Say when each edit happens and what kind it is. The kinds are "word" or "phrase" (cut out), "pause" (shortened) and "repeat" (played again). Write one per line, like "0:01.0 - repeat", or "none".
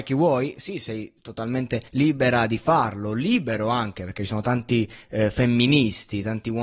0:01.9 - pause